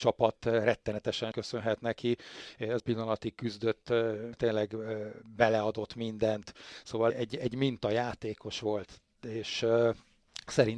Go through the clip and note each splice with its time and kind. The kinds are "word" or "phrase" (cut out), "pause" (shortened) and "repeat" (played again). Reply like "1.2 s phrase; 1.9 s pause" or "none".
1.3 s word; 2.8 s word; 4.3 s phrase; 7.1 s phrase